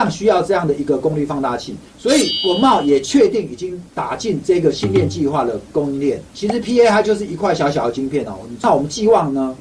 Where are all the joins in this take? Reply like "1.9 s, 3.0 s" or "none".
1.9 s, 6.3 s

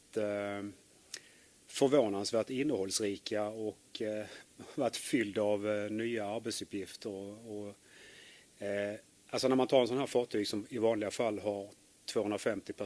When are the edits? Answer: none

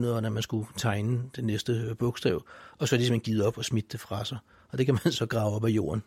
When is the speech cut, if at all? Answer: none

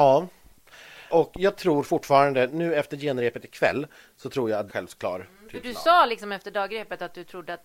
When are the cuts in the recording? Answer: 1.1 s, 2.5 s, 4.7 s

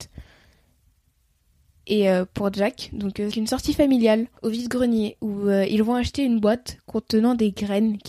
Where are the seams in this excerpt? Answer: 3.3 s, 4.4 s

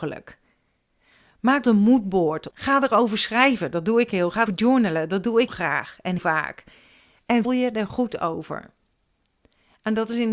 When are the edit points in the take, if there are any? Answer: 1.6 s, 2.5 s, 4.5 s, 5.5 s, 6.2 s, 7.4 s

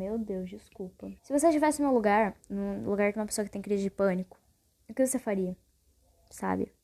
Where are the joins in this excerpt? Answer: 1.2 s, 2.4 s

